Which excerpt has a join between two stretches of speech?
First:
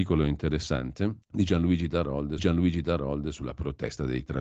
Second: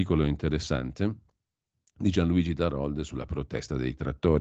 first; 2 cuts; at 1.2 s, 2.4 s

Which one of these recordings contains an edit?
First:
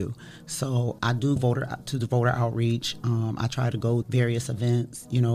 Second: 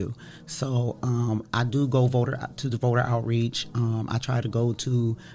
first; 3 cuts; at 1.0 s, 1.4 s, 4.0 s

